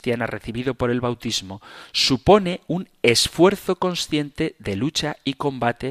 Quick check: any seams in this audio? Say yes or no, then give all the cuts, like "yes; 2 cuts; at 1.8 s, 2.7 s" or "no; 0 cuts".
no; 0 cuts